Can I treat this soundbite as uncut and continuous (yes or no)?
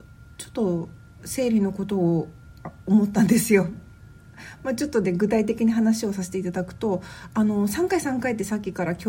yes